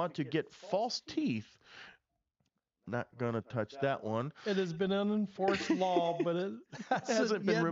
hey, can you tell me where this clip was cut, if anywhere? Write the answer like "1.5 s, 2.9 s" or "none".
none